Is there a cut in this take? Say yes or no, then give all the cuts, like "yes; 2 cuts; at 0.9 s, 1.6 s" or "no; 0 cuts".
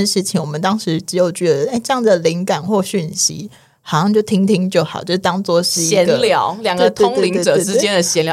no; 0 cuts